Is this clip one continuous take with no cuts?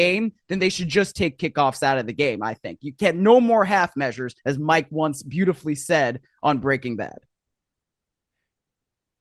no; 1 cut; at 4.4 s

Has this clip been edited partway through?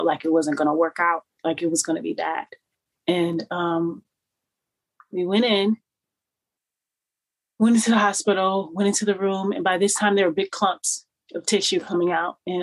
no; 0 cuts

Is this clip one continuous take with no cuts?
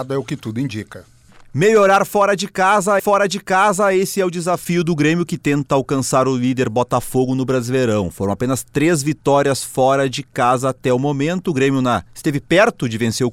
no; 1 cut; at 3.0 s

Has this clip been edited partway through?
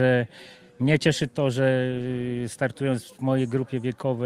no; 0 cuts

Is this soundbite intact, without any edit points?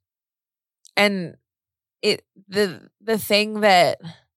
yes; 0 cuts

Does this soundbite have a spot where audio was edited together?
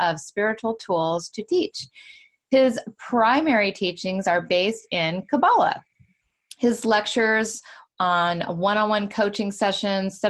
no; 0 cuts

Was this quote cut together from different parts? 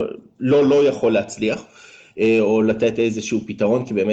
no; 0 cuts

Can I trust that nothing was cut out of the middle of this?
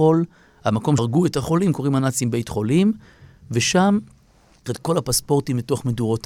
no; 2 cuts; at 1.0 s, 4.7 s

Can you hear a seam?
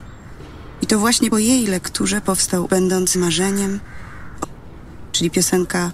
yes; 4 cuts; at 1.3 s, 2.7 s, 3.1 s, 4.4 s

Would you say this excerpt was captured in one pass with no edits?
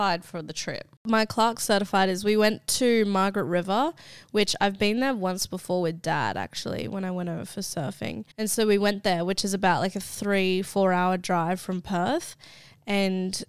no; 1 cut; at 8.3 s

